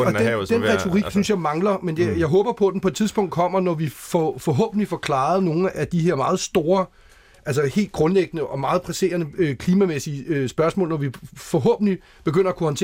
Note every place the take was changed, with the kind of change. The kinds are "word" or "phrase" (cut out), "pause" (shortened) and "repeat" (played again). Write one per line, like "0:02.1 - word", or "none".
0:05.7 - word